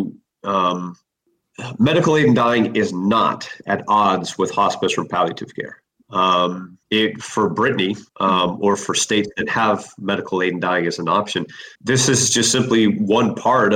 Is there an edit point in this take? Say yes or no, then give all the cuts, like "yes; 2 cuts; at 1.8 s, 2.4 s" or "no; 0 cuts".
yes; 3 cuts; at 6.8 s, 8.1 s, 11.7 s